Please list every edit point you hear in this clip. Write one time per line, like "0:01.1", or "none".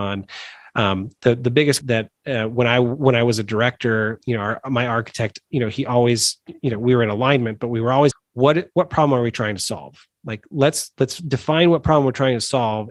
0:01.8
0:08.1